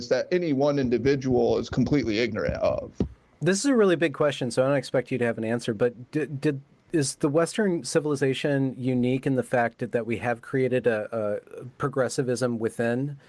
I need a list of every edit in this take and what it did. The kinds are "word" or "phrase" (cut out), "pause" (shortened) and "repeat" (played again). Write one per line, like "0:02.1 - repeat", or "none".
none